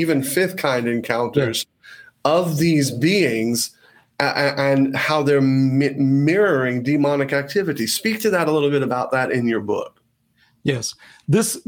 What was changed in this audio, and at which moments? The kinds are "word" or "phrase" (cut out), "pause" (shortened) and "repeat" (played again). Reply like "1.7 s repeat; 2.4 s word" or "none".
none